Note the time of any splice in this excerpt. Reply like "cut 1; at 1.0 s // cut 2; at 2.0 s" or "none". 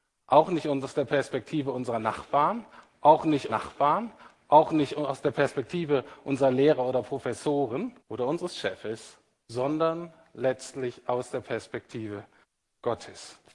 cut 1; at 3.5 s // cut 2; at 8.0 s // cut 3; at 12.4 s